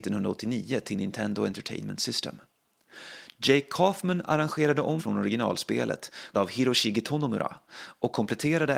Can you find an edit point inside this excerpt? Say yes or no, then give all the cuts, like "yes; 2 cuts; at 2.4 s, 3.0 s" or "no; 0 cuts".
yes; 2 cuts; at 5.0 s, 6.3 s